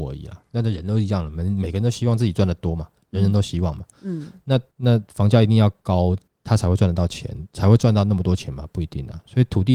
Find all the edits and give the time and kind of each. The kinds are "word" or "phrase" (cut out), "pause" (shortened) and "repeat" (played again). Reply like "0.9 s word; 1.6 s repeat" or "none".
4.7 s pause; 6.3 s pause